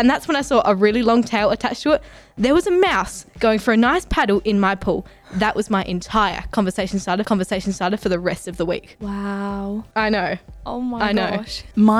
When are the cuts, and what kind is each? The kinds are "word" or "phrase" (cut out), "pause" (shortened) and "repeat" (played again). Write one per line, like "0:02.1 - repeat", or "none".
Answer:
0:07.2 - repeat